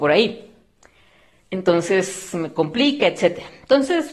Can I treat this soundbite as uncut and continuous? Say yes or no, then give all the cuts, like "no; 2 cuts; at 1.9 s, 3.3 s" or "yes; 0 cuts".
yes; 0 cuts